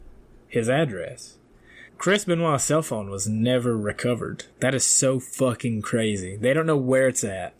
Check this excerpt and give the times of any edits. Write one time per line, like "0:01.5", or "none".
0:01.9
0:04.5